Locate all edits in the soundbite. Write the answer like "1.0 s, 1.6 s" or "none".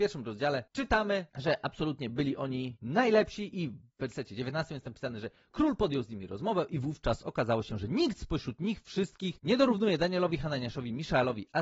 none